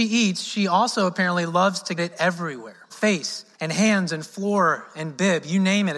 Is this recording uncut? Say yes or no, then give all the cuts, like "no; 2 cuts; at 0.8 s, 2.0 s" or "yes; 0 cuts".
no; 3 cuts; at 2.0 s, 2.9 s, 3.5 s